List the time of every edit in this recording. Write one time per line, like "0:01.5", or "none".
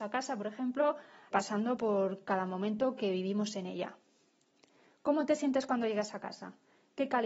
0:01.3